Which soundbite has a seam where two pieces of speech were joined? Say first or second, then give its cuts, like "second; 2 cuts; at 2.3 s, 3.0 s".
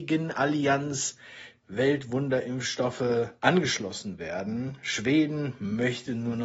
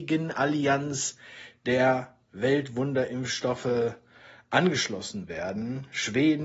first; 2 cuts; at 1.6 s, 3.4 s